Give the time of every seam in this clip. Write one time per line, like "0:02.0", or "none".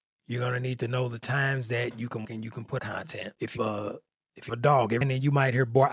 0:02.2
0:02.8
0:03.6
0:04.5
0:05.0